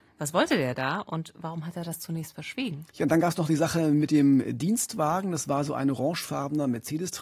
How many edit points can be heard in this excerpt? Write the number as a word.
one